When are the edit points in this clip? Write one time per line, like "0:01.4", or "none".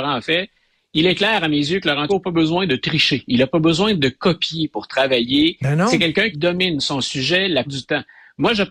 0:02.1
0:06.3
0:07.7